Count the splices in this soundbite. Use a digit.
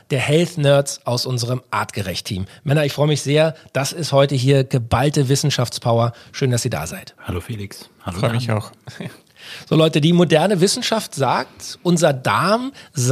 0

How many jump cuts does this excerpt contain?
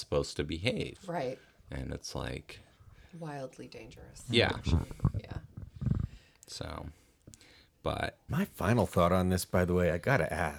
1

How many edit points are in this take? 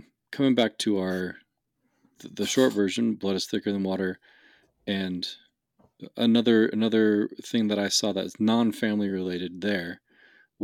0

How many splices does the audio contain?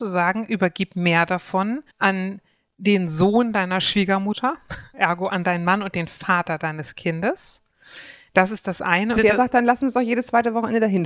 3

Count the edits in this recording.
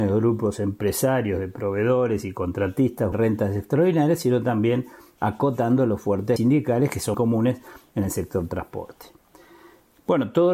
3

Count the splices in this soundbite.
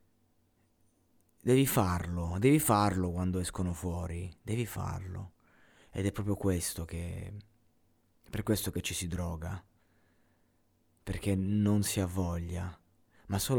0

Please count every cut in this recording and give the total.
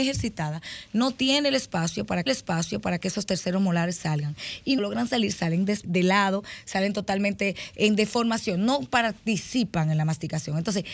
3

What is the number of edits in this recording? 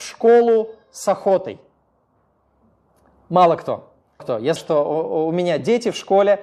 2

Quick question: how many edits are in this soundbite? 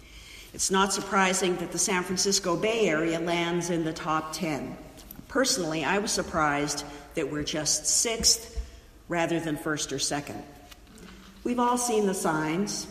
0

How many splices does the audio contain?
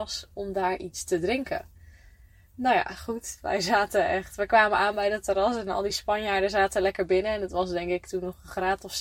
0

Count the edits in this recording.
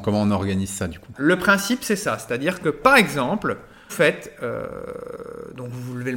2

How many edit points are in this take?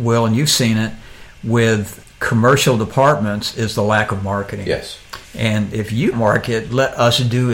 3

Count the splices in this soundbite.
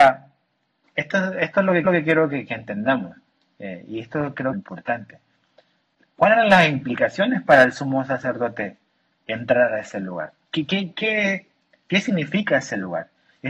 2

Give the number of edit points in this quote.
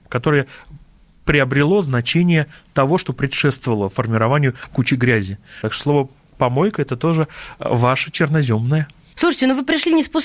0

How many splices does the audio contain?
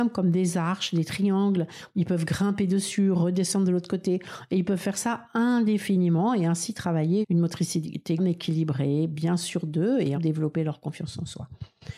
3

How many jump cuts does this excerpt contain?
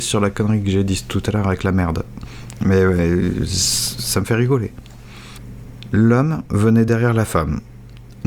0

